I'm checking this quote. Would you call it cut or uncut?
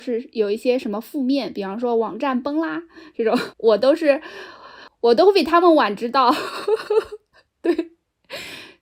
cut